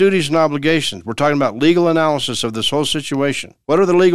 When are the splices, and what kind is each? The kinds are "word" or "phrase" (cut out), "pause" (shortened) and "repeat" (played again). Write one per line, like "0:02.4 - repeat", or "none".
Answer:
none

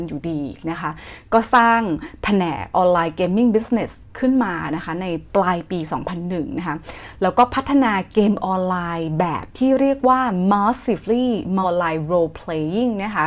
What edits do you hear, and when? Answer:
0:11.6 - word

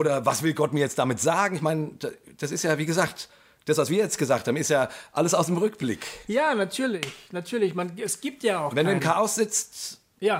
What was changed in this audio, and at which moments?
none

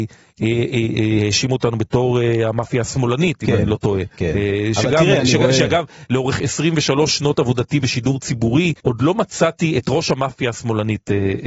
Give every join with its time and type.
0:04.1 - pause
0:08.8 - pause

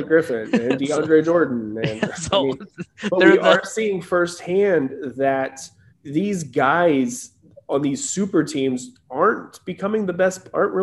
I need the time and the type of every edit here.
0:05.9 - pause

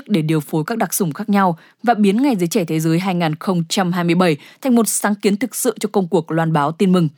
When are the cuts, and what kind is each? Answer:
none

